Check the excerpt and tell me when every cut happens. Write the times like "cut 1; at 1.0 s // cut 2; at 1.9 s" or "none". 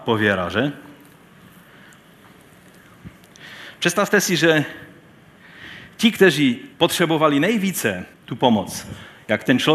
cut 1; at 6.7 s // cut 2; at 8.1 s